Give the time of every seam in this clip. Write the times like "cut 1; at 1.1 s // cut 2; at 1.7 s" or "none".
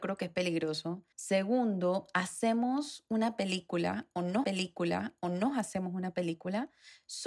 cut 1; at 1.1 s // cut 2; at 4.4 s